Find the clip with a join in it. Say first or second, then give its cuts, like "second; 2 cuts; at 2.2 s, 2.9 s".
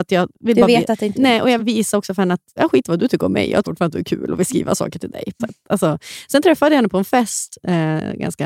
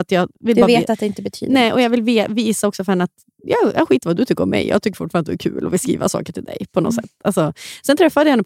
first; 5 cuts; at 1.1 s, 1.6 s, 2.6 s, 3.6 s, 5.4 s